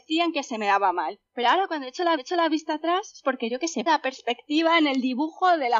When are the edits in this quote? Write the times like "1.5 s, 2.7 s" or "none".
1.3 s, 2.2 s, 3.9 s